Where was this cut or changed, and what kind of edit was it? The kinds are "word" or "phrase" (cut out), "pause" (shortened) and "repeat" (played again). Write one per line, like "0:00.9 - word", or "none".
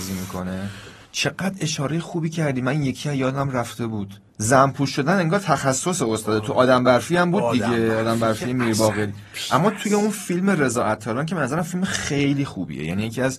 0:01.1 - pause
0:04.3 - pause